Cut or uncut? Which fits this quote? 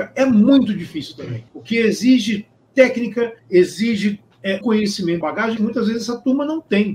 cut